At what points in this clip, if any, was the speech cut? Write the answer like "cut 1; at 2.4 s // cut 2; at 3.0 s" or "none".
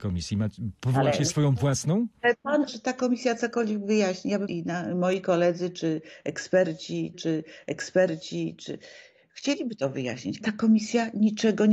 cut 1; at 2.7 s // cut 2; at 4.5 s // cut 3; at 7.1 s // cut 4; at 10.4 s

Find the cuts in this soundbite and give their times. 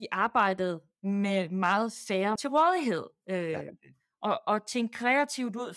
cut 1; at 2.4 s

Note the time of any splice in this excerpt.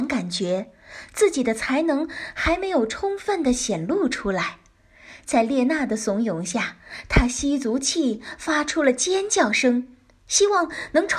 none

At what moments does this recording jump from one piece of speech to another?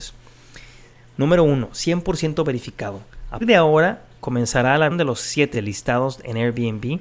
cut 1; at 3.4 s // cut 2; at 4.9 s // cut 3; at 5.5 s

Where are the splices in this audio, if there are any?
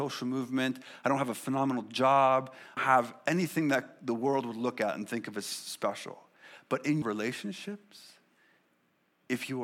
cut 1; at 2.8 s // cut 2; at 7.0 s

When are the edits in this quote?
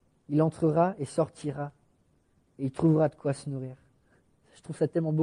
none

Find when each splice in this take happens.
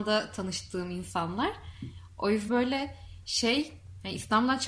cut 1; at 2.5 s

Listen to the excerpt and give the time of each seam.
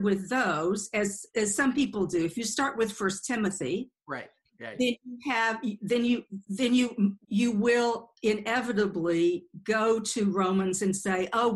cut 1; at 7.2 s

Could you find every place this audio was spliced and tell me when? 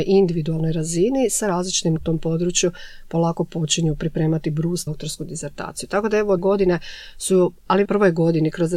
cut 1; at 2.0 s // cut 2; at 4.9 s // cut 3; at 6.4 s // cut 4; at 7.8 s

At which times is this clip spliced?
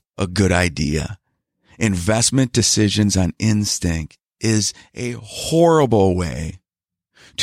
none

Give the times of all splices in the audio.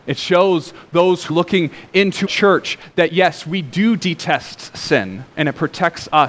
cut 1; at 1.3 s // cut 2; at 2.2 s // cut 3; at 5.3 s

